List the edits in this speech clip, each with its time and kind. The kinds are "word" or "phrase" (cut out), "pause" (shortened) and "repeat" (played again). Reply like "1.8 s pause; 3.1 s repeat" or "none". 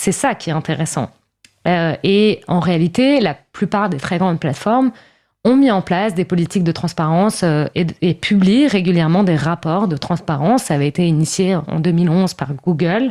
none